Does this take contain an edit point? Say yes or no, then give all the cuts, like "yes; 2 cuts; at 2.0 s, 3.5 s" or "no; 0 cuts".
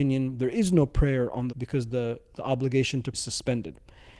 yes; 2 cuts; at 1.5 s, 3.1 s